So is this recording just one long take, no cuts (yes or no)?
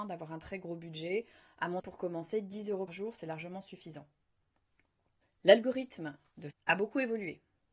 no